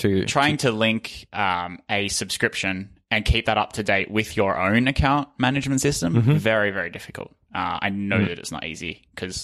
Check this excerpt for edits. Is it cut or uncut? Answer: uncut